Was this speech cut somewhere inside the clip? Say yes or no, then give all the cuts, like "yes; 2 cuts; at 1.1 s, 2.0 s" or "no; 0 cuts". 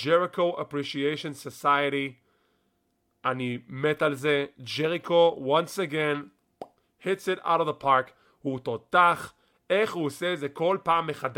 no; 0 cuts